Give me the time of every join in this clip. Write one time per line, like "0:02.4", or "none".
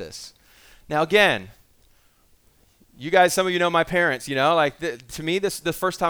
none